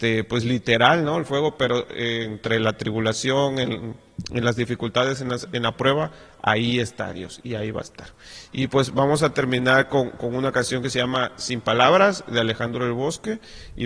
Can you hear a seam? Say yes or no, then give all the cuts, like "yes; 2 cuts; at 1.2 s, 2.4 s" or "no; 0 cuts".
no; 0 cuts